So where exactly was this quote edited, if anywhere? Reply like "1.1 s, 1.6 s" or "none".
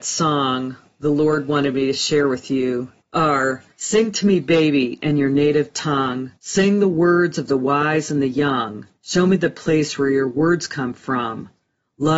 3.7 s, 6.4 s, 9.0 s

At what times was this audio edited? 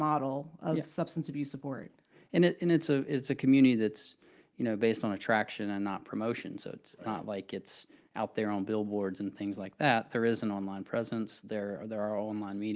none

